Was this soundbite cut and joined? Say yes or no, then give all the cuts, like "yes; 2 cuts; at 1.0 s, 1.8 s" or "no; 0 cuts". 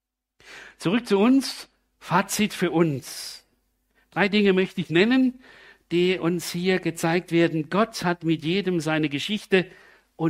no; 0 cuts